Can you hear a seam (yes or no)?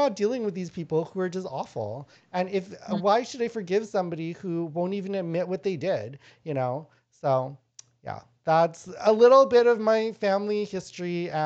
no